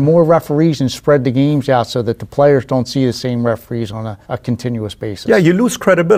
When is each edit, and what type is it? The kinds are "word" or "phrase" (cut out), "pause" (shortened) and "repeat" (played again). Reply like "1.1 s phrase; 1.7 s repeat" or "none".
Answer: 4.2 s pause

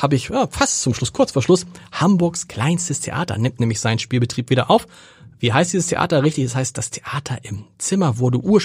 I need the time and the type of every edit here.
none

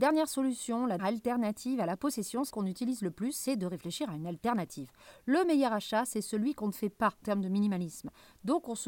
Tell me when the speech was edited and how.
1.0 s word; 2.5 s word; 7.2 s word

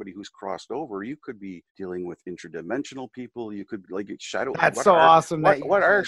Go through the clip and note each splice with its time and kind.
1.7 s pause; 3.8 s word

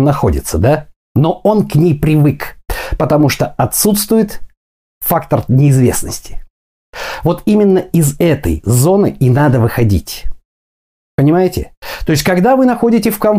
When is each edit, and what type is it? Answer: none

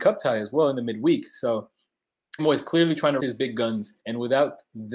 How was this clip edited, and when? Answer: 2.4 s word; 3.2 s word; 4.0 s pause

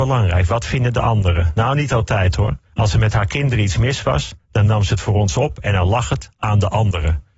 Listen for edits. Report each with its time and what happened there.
2.6 s pause

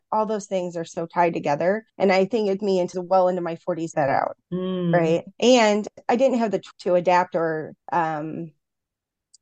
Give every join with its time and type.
1.9 s pause; 2.6 s word; 2.9 s phrase; 3.9 s phrase; 4.4 s pause; 5.3 s pause; 6.7 s word; 7.8 s pause

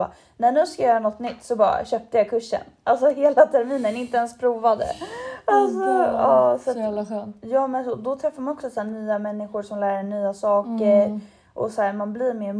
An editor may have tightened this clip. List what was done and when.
none

